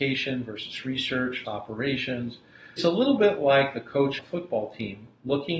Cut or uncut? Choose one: cut